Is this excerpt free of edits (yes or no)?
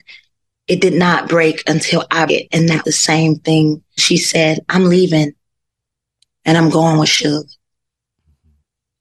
no